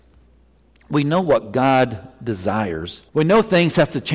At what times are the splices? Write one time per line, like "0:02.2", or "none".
0:03.1